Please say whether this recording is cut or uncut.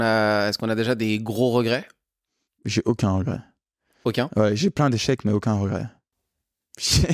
uncut